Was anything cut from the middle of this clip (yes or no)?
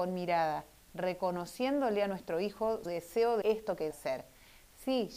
yes